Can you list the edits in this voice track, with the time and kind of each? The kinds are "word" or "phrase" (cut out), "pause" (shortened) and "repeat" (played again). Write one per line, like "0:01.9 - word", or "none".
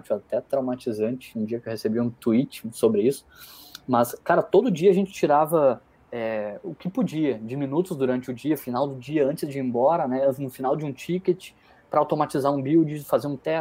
none